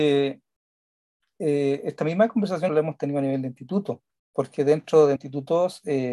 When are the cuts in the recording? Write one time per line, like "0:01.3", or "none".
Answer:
0:02.7
0:04.1
0:05.2